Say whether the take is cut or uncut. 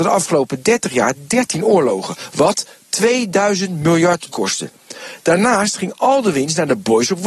cut